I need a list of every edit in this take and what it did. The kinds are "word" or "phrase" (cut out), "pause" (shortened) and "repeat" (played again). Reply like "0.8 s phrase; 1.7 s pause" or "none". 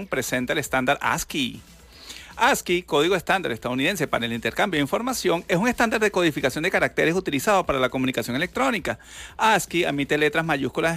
none